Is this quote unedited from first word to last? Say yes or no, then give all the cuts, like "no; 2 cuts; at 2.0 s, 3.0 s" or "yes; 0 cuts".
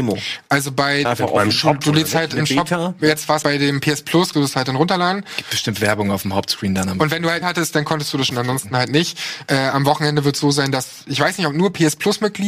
no; 5 cuts; at 1.0 s, 3.4 s, 4.3 s, 7.4 s, 8.3 s